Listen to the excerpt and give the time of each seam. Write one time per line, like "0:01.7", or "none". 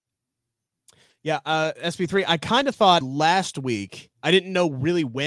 0:03.0
0:04.1